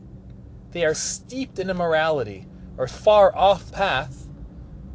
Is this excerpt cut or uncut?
cut